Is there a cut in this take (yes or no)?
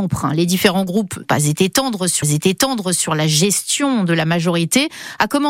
yes